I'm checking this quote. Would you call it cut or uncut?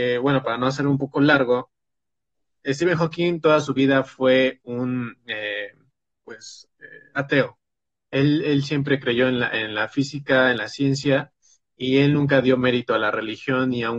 uncut